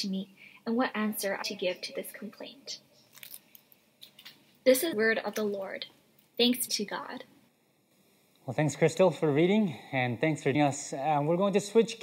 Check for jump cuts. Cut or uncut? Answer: cut